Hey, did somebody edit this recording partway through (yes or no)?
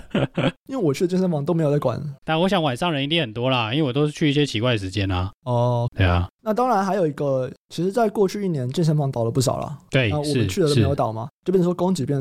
yes